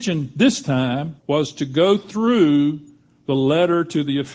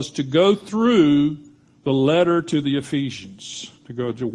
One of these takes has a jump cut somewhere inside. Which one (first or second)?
first